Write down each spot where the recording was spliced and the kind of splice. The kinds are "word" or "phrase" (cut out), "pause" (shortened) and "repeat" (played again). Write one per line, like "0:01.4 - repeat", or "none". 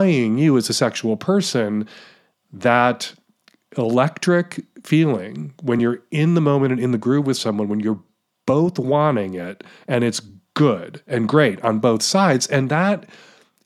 none